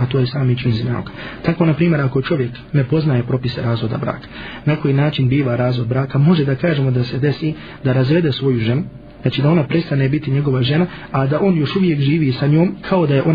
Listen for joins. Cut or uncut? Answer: uncut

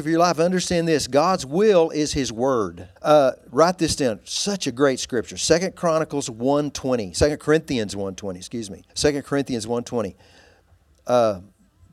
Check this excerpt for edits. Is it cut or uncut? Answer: cut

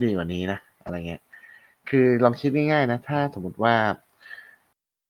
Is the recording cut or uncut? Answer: uncut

